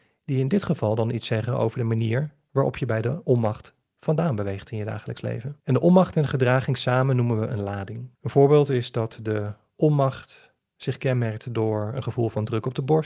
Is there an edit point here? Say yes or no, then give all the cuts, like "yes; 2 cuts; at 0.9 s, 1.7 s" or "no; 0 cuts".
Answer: yes; 2 cuts; at 5.6 s, 8.1 s